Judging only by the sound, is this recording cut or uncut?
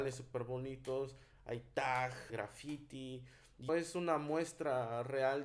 cut